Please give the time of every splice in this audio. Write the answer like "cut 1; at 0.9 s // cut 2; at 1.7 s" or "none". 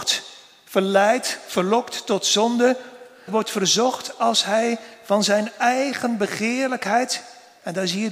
cut 1; at 3.3 s